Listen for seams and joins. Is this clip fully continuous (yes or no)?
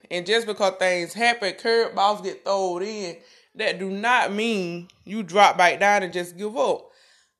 yes